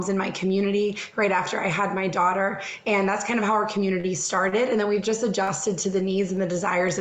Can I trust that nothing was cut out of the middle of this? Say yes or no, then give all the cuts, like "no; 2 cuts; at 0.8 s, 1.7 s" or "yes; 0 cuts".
yes; 0 cuts